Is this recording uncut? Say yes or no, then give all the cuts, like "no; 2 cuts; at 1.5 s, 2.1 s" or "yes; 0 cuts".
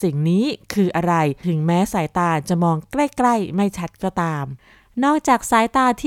yes; 0 cuts